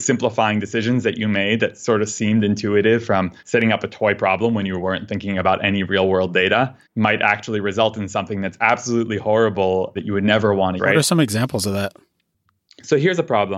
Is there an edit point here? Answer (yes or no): yes